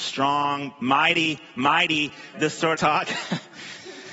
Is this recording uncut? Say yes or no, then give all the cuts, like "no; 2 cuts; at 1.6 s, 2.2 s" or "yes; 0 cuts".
no; 2 cuts; at 2.3 s, 2.7 s